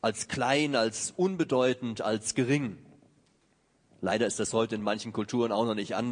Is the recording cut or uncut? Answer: uncut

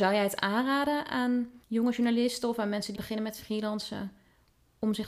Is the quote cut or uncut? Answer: cut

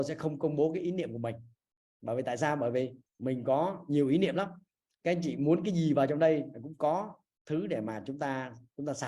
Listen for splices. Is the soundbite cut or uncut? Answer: cut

